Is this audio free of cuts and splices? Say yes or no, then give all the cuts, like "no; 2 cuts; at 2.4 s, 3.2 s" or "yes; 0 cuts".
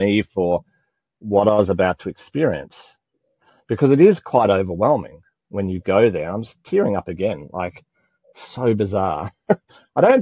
yes; 0 cuts